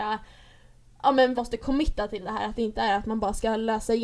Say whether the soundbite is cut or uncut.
cut